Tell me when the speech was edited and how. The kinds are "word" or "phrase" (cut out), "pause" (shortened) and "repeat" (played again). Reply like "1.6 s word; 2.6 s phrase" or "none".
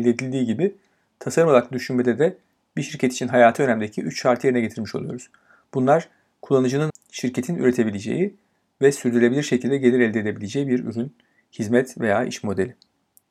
6.9 s word